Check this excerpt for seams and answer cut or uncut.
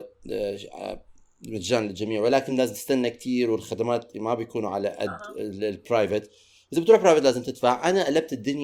uncut